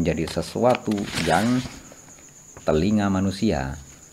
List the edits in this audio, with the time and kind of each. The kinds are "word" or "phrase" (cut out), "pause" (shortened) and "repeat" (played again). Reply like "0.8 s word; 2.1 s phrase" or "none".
2.6 s word

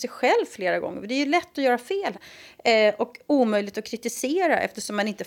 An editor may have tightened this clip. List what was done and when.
none

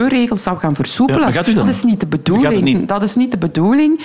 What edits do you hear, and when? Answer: 1.6 s word; 2.7 s word

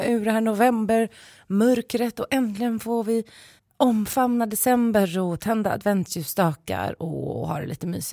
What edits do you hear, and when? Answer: 3.6 s pause

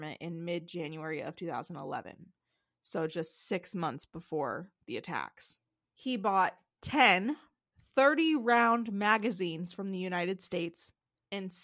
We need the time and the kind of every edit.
none

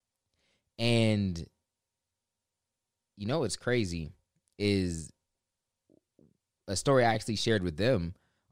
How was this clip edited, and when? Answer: none

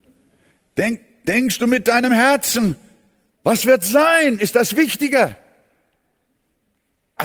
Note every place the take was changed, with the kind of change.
none

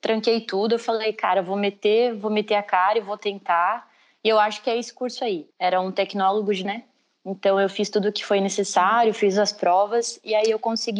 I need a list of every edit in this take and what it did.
5.5 s pause; 6.6 s phrase

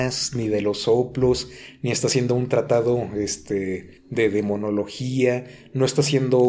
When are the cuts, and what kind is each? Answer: 4.0 s pause

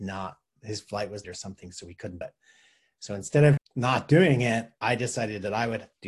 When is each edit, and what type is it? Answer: 1.2 s word; 2.2 s word; 3.6 s word

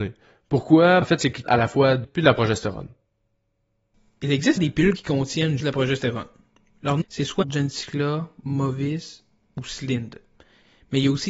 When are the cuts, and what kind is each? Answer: 1.0 s word; 1.5 s word; 2.0 s word; 4.6 s word; 5.0 s word; 5.6 s word; 7.0 s word; 7.4 s word

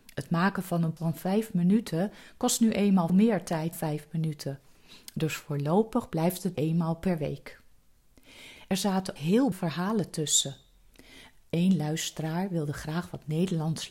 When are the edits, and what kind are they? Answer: 1.0 s word; 3.1 s word; 3.7 s word; 6.5 s word; 9.2 s word; 9.5 s word

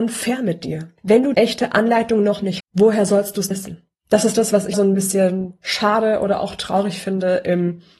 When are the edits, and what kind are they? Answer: 1.0 s pause; 1.3 s word; 2.6 s word; 3.5 s word; 4.0 s pause; 4.7 s word

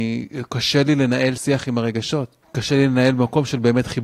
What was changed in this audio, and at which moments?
2.4 s pause

